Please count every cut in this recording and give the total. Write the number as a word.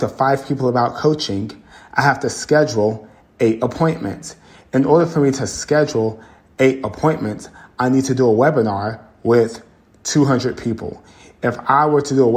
zero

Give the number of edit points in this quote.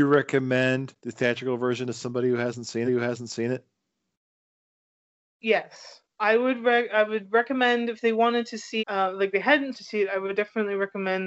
five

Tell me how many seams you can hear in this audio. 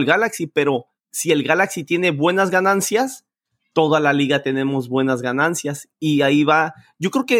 zero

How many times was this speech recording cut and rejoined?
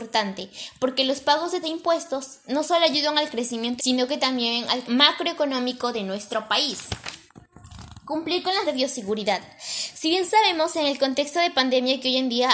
four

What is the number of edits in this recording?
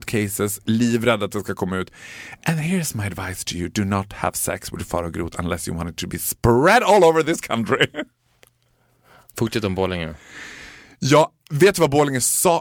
zero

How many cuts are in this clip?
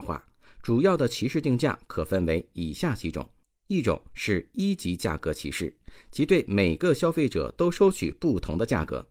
one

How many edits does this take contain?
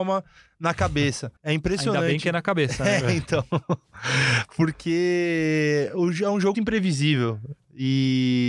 two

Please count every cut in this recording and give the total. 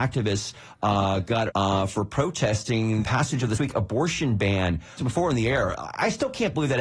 four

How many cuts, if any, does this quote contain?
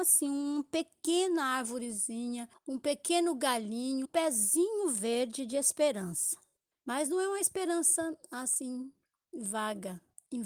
one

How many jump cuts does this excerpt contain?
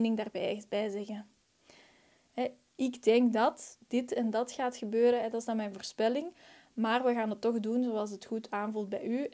zero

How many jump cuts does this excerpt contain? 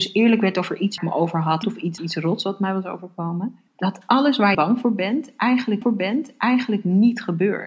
six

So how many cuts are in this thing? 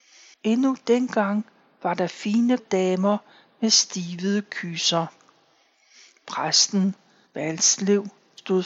one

